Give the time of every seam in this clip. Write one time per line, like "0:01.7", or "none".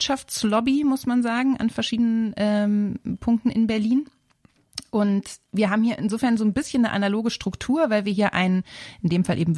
0:05.4